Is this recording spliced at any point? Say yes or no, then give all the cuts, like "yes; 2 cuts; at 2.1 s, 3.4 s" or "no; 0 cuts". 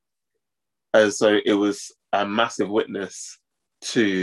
no; 0 cuts